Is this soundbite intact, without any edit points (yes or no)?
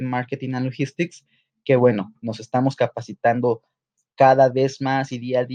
yes